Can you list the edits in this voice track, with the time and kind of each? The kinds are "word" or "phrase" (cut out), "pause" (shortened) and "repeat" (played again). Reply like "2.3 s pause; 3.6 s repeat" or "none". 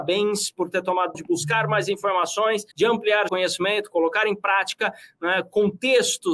1.1 s word; 2.7 s pause; 3.3 s word